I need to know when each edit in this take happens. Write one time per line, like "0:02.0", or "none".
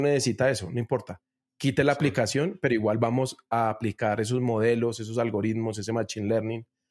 none

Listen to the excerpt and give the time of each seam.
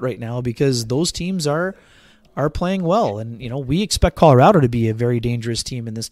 none

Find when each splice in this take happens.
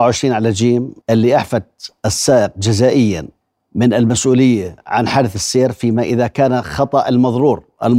0:01.0
0:03.4

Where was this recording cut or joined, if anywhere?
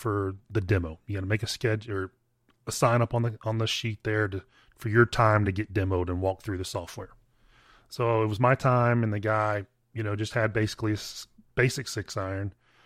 none

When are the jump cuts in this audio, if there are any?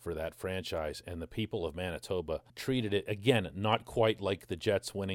0:02.5

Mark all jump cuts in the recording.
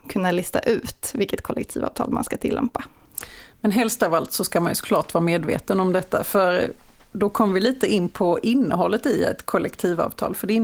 none

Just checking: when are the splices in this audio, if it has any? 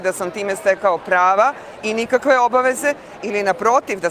none

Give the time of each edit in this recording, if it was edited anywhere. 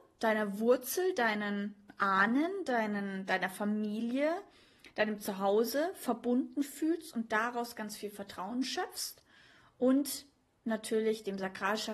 none

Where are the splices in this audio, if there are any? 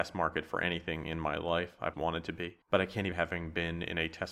0:01.9
0:03.1

